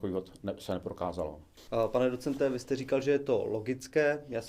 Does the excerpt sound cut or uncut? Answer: uncut